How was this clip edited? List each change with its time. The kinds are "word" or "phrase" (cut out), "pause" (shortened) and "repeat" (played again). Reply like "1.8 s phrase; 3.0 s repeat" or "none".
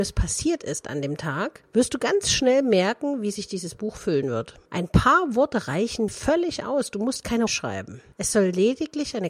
6.1 s word; 7.5 s word